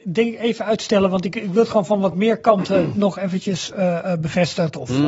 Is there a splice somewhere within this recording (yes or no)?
no